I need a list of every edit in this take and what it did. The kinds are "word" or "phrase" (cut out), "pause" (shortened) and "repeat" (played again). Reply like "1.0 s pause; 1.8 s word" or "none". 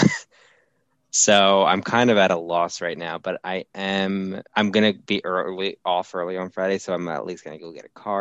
4.5 s pause